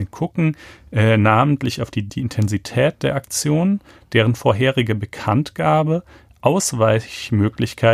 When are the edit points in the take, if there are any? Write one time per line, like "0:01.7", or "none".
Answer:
0:02.1